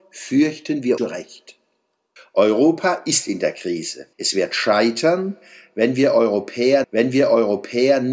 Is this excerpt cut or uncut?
cut